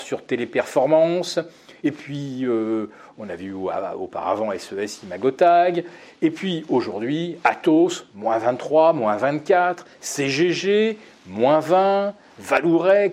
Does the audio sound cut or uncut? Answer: uncut